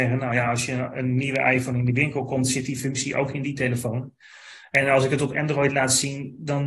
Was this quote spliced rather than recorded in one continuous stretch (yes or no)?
no